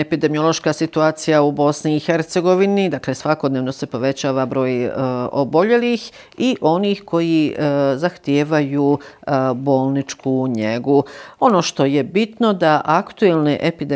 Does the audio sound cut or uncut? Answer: uncut